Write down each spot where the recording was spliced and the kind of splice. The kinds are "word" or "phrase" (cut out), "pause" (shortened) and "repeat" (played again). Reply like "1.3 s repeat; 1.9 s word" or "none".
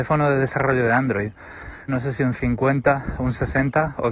1.9 s word